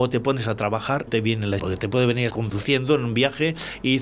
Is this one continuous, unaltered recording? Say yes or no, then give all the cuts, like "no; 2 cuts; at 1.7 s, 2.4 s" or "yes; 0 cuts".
no; 3 cuts; at 1.1 s, 1.6 s, 2.3 s